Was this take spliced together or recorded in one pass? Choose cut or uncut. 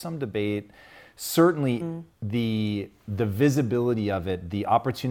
cut